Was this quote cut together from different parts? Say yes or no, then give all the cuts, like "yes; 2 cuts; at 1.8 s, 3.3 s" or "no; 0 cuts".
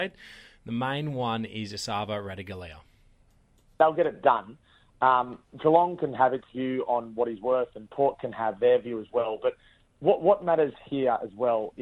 no; 0 cuts